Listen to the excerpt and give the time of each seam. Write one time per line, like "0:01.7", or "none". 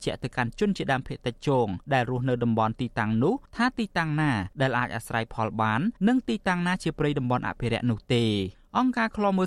0:01.8
0:03.5
0:04.5
0:06.0
0:08.5